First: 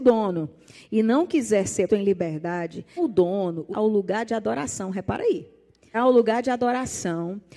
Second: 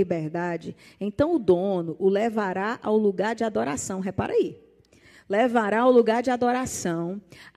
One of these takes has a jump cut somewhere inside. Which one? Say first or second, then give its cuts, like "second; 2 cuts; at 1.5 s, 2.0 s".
first; 4 cuts; at 1.9 s, 3.0 s, 3.7 s, 5.9 s